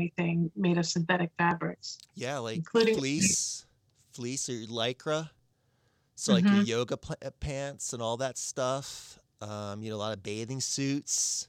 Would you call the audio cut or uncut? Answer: uncut